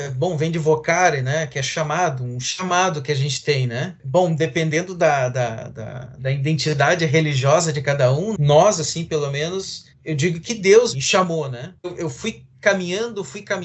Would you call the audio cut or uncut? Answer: cut